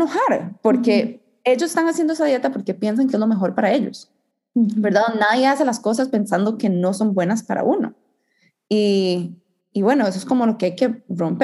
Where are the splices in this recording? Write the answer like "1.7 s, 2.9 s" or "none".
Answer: none